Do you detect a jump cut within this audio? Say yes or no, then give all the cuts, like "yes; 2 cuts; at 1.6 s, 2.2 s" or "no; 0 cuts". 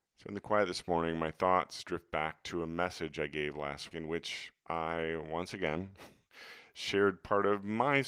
yes; 1 cut; at 3.9 s